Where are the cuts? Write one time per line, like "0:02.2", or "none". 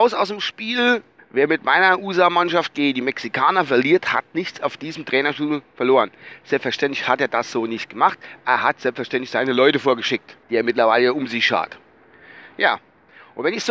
0:01.2
0:10.4